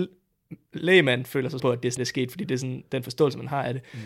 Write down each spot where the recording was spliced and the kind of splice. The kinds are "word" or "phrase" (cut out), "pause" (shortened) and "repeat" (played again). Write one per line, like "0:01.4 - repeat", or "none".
0:01.6 - word
0:02.0 - word